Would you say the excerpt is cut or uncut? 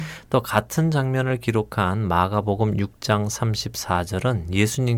uncut